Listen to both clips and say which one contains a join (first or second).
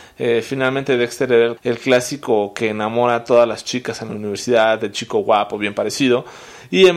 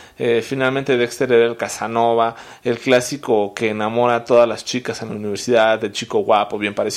first